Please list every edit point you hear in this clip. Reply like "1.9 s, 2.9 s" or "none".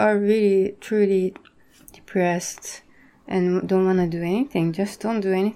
none